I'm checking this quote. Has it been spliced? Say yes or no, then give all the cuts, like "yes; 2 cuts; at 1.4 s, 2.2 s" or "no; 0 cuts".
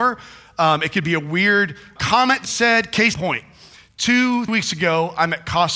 yes; 4 cuts; at 2.0 s, 2.4 s, 3.1 s, 4.5 s